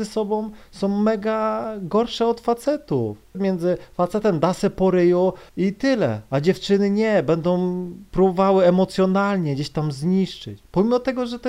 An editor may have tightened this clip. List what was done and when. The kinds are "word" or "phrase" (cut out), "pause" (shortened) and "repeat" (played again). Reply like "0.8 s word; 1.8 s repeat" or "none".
3.3 s word; 5.5 s pause